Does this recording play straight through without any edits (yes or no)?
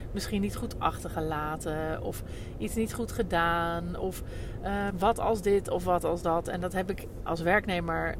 no